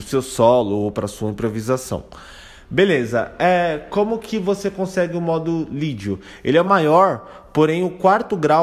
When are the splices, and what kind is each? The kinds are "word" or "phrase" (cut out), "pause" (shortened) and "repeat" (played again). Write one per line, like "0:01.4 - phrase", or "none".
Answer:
0:06.7 - word